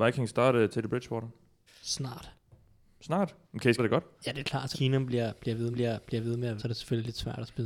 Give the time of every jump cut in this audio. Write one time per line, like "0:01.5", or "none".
0:01.7
0:03.4
0:03.8
0:04.1
0:04.7
0:05.7
0:06.6

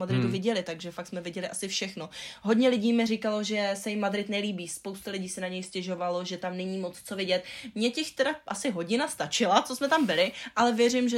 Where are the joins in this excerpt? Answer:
none

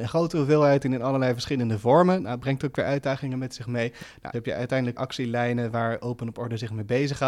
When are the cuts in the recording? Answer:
0:04.3
0:05.0

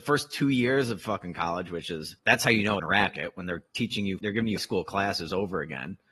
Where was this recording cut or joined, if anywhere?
0:02.2
0:02.8
0:04.2
0:04.6

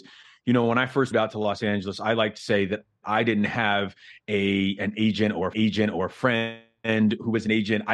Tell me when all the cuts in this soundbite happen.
0:01.1
0:02.4
0:05.5

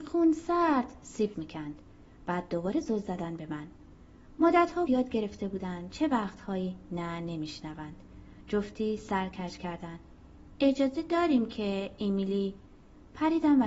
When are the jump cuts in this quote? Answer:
0:01.3
0:04.9

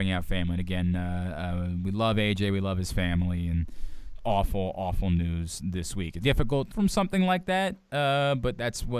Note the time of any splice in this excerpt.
0:04.2
0:06.2
0:06.7

